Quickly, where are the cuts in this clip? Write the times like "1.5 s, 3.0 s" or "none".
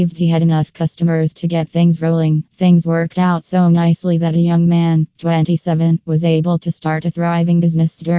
2.5 s